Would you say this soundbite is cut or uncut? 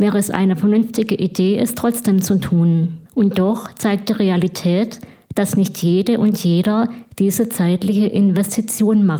cut